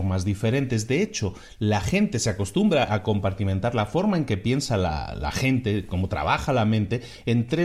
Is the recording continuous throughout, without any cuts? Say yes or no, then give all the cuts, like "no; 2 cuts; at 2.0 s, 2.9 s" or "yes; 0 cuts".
yes; 0 cuts